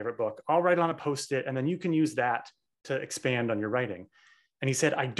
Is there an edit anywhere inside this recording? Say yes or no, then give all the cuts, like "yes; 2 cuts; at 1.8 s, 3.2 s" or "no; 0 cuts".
no; 0 cuts